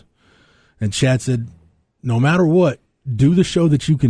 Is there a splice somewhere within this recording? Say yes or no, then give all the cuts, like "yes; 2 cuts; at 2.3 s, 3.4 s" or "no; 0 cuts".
no; 0 cuts